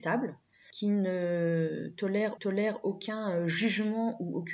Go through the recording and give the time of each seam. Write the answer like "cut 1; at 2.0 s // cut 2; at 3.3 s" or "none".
cut 1; at 2.4 s